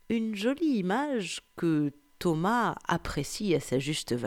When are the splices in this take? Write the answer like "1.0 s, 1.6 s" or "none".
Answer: none

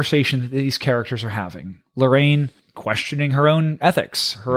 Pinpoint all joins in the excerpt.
2.6 s

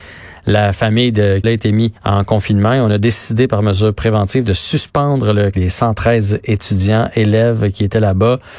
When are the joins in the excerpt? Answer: 1.4 s, 2.0 s, 5.5 s

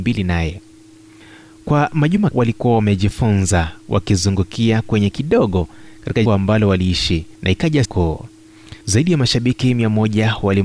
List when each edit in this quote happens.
2.3 s, 5.1 s, 6.3 s, 7.3 s, 7.8 s, 8.8 s

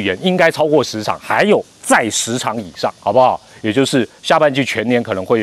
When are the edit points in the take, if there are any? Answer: 1.7 s, 3.0 s, 4.2 s

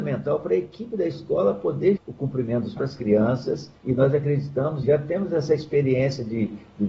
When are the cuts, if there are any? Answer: 2.0 s, 2.8 s, 3.8 s, 4.8 s

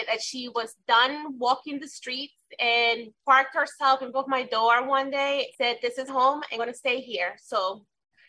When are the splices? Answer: 3.2 s, 4.1 s, 5.5 s, 6.1 s, 6.6 s

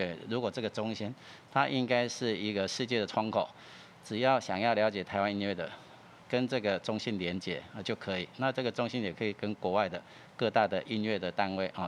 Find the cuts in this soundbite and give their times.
none

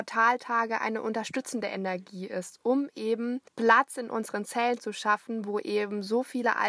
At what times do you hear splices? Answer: 3.5 s

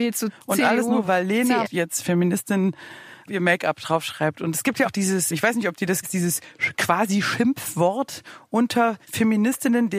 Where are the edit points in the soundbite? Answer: 1.0 s, 1.6 s, 3.3 s, 4.8 s, 5.3 s, 6.0 s, 9.0 s

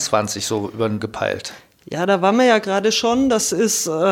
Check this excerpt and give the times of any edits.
1.0 s

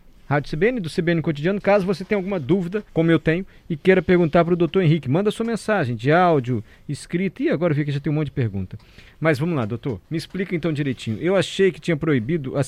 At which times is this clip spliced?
2.9 s, 10.1 s

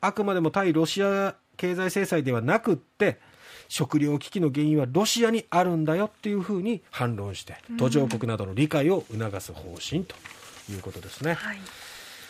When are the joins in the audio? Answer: 1.5 s, 6.9 s, 7.6 s

